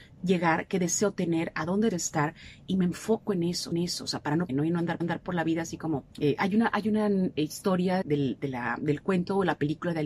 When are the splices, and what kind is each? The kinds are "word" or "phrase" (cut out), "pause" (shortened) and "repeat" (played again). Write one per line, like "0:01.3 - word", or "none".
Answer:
0:01.9 - word
0:03.7 - repeat
0:04.5 - word
0:05.0 - repeat
0:06.1 - pause
0:08.0 - word